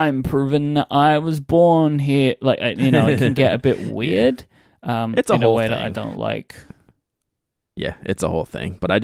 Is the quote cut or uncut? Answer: uncut